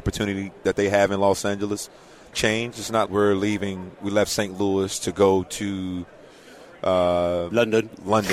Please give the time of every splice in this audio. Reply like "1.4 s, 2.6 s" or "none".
2.3 s, 3.1 s